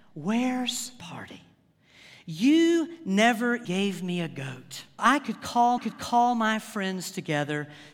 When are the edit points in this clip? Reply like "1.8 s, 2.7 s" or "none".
1.0 s, 3.6 s, 5.0 s, 5.8 s